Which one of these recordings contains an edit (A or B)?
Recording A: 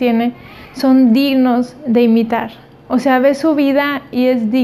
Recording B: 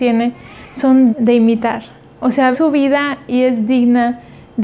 B